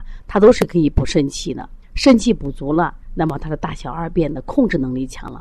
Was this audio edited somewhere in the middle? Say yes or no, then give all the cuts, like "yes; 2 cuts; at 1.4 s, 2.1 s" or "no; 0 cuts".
yes; 2 cuts; at 1.8 s, 3.0 s